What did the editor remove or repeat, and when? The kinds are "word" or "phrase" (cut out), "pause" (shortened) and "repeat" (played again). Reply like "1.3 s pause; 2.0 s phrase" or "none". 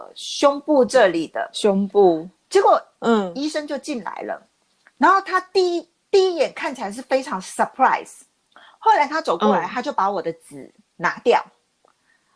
8.5 s pause